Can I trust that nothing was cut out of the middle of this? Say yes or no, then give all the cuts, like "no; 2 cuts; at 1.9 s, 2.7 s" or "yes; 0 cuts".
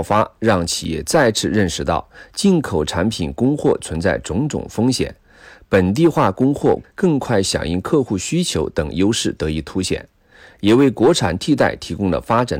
no; 1 cut; at 6.8 s